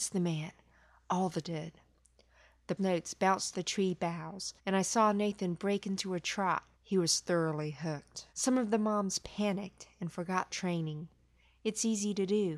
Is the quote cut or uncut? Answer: cut